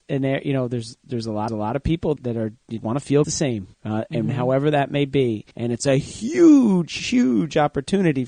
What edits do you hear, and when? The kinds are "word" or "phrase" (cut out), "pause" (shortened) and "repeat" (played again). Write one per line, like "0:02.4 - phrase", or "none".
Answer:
0:01.5 - repeat
0:02.2 - word
0:02.8 - word
0:03.2 - phrase
0:03.7 - pause
0:05.5 - pause
0:07.0 - word